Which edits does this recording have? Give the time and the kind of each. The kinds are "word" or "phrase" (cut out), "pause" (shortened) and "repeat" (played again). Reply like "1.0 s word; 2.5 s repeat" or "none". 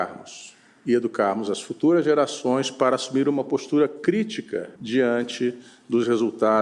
4.8 s pause